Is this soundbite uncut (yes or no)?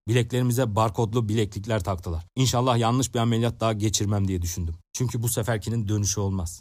yes